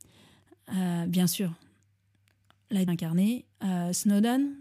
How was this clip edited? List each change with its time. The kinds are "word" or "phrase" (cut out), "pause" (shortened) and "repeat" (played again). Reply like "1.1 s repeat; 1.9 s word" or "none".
2.9 s word; 3.5 s pause

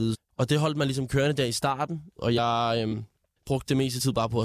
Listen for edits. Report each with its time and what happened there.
none

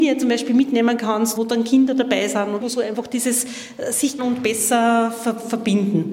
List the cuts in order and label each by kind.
1.4 s word; 2.6 s word; 4.2 s word

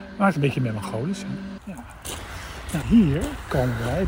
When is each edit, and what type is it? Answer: 2.8 s word

